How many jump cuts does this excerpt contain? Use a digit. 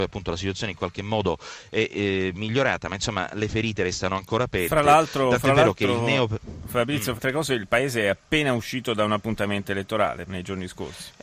2